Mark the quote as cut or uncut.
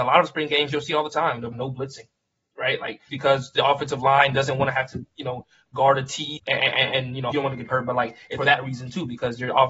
cut